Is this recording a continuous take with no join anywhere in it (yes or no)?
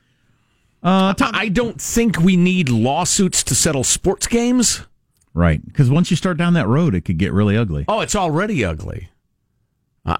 yes